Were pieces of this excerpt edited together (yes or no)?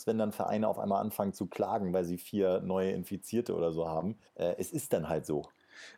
yes